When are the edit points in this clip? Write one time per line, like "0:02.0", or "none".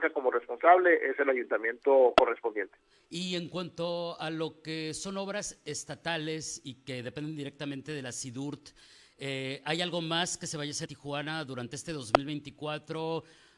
0:10.9